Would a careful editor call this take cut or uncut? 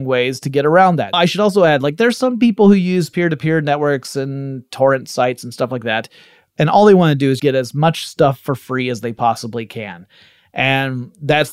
cut